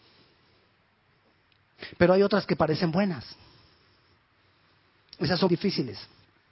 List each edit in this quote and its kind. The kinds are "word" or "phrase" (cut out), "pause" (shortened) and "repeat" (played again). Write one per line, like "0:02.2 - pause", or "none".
0:05.5 - word